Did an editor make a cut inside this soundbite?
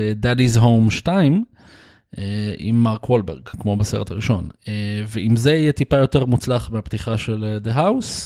no; 0 cuts

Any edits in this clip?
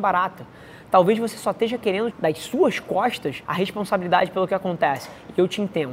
yes; 2 cuts; at 2.1 s, 3.4 s

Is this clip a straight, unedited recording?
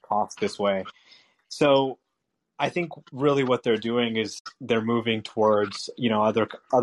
yes; 0 cuts

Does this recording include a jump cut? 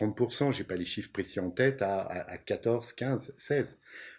no; 0 cuts

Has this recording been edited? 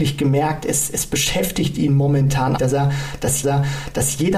yes; 2 cuts; at 2.6 s, 3.4 s

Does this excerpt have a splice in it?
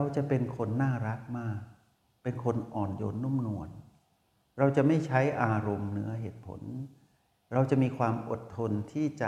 no; 0 cuts

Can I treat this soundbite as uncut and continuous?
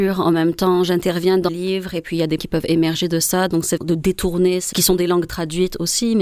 no; 4 cuts; at 1.5 s, 2.4 s, 3.8 s, 4.7 s

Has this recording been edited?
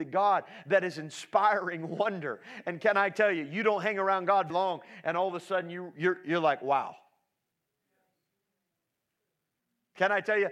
yes; 1 cut; at 4.5 s

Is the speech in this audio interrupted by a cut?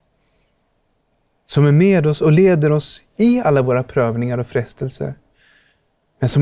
no; 0 cuts

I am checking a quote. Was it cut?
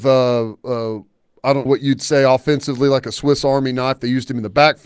yes; 1 cut; at 1.7 s

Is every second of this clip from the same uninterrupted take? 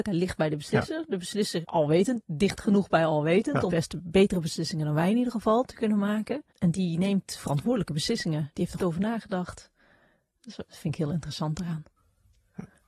no; 5 cuts; at 1.6 s, 3.7 s, 6.5 s, 8.8 s, 10.7 s

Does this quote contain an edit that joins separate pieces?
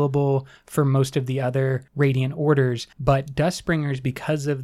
yes; 2 cuts; at 1.9 s, 2.9 s

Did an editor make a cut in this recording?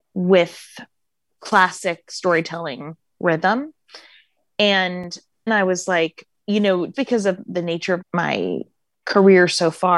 yes; 3 cuts; at 5.5 s, 6.9 s, 8.0 s

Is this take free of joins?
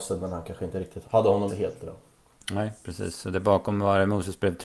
no; 2 cuts; at 1.0 s, 1.5 s

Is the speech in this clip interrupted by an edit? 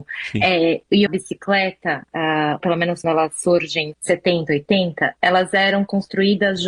yes; 4 cuts; at 1.1 s, 2.6 s, 3.0 s, 3.9 s

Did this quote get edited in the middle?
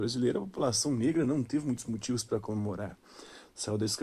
no; 0 cuts

